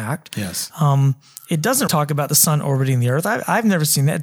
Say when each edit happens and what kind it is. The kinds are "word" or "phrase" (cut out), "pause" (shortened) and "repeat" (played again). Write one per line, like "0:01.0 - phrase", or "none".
0:01.9 - word

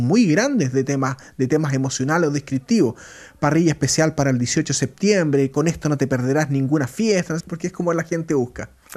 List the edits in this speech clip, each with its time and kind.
0:07.4 - word

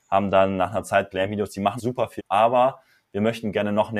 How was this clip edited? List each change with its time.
0:01.1 - word
0:01.8 - word
0:02.2 - word

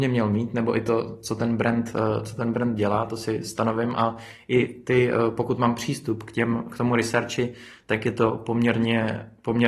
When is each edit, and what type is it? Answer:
none

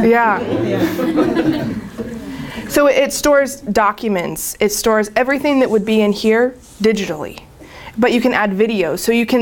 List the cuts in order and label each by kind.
none

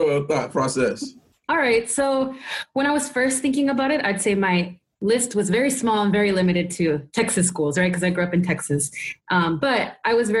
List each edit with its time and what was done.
none

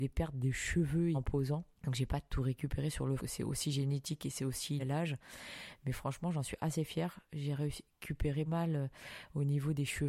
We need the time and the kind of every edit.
0:01.1 - phrase
0:03.2 - phrase
0:04.8 - word
0:08.5 - word

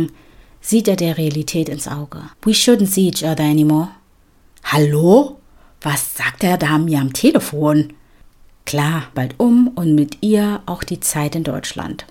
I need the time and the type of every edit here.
0:02.3 - pause
0:09.1 - phrase

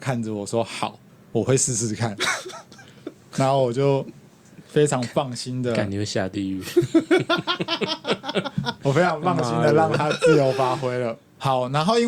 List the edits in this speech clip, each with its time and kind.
none

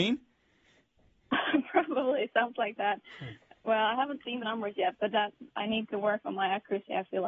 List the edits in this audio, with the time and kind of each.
0:04.4 - word

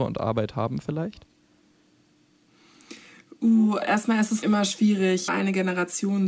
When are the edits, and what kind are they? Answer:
0:03.8 - word
0:04.4 - word
0:05.3 - word

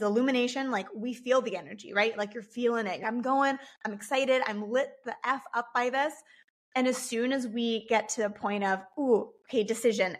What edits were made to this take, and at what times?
0:03.0 - word

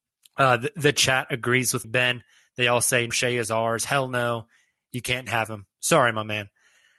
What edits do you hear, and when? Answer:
0:01.8 - word
0:03.1 - word

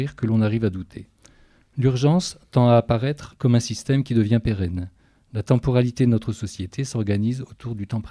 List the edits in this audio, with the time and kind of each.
none

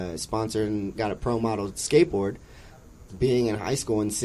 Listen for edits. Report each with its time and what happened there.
0:01.0 - word
0:03.1 - word

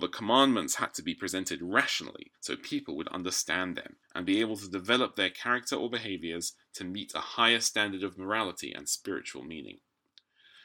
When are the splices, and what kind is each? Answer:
0:02.3 - pause
0:04.0 - pause

